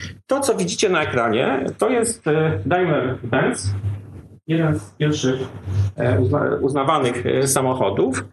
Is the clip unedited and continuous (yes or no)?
yes